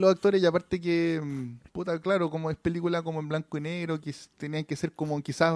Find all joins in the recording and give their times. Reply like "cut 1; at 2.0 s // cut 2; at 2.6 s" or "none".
cut 1; at 1.7 s